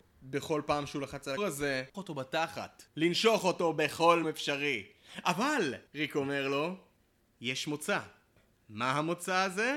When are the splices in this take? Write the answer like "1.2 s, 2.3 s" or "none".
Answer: 1.4 s, 1.9 s, 4.2 s, 5.9 s